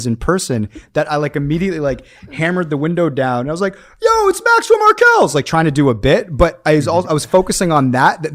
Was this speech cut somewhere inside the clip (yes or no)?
no